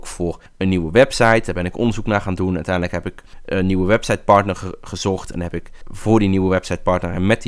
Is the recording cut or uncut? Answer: uncut